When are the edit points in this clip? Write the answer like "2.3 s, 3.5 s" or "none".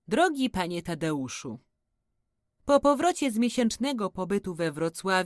none